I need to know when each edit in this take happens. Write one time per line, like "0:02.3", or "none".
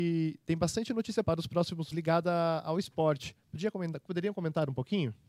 0:01.2
0:01.9
0:04.1